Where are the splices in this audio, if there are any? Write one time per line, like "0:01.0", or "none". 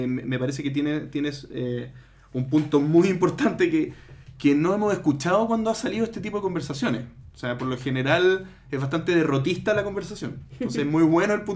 none